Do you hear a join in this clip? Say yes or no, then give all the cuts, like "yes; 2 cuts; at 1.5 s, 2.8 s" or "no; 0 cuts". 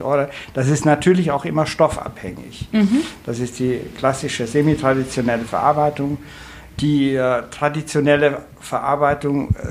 no; 0 cuts